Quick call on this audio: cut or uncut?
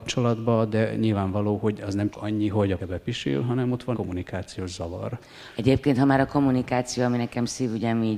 cut